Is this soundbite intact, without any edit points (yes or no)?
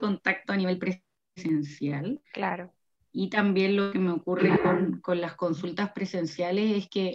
no